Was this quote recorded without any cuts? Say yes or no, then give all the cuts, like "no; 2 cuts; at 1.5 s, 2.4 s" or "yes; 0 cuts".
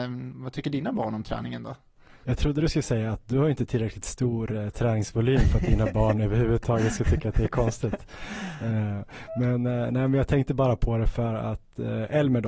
yes; 0 cuts